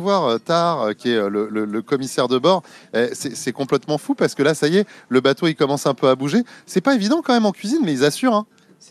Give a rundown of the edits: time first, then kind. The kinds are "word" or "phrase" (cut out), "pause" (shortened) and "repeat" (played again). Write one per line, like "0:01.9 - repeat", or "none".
none